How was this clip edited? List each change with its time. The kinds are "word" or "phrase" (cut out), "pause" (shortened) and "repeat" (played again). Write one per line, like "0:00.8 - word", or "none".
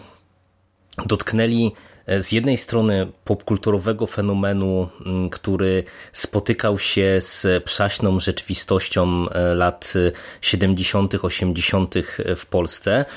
none